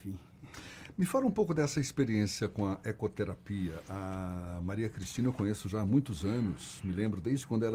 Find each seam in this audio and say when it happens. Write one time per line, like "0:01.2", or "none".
none